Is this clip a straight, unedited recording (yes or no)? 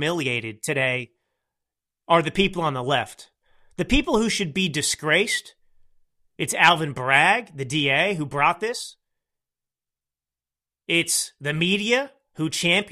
yes